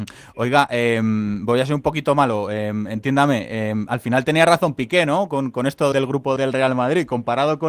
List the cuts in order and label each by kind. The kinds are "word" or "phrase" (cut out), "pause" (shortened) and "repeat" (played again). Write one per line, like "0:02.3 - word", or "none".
0:05.9 - word
0:06.4 - word